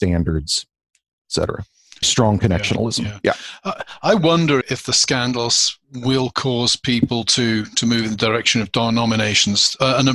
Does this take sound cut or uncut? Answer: cut